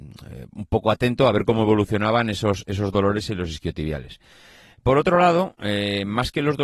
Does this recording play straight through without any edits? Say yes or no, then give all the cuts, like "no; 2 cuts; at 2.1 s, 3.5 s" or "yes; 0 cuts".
yes; 0 cuts